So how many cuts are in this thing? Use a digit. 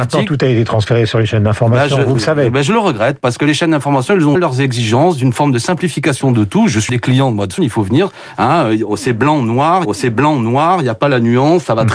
4